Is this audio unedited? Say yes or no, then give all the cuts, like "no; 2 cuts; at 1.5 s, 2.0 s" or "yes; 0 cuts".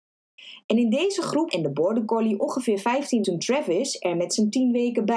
no; 2 cuts; at 1.5 s, 3.2 s